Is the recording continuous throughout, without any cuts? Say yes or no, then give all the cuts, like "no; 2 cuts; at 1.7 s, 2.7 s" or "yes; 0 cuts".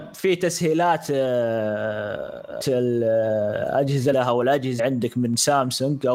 no; 3 cuts; at 2.6 s, 4.1 s, 4.8 s